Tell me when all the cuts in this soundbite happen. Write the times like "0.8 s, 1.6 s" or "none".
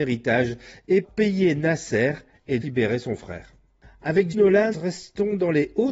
1.0 s, 2.6 s, 4.3 s, 4.7 s